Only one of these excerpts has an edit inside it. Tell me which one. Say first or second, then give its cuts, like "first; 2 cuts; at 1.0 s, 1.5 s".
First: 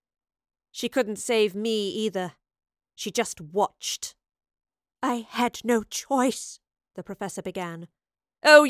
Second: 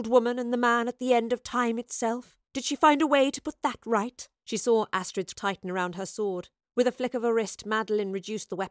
second; 4 cuts; at 2.4 s, 4.4 s, 5.3 s, 6.6 s